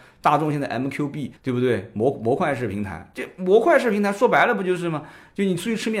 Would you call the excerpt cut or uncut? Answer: cut